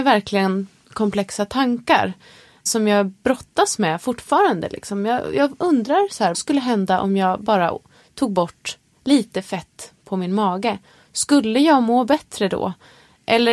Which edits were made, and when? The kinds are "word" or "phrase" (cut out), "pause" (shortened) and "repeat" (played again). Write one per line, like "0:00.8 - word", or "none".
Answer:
0:06.3 - word